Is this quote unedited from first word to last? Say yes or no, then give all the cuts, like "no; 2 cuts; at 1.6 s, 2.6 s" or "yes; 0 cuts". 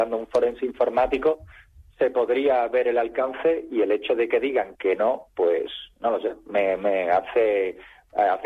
yes; 0 cuts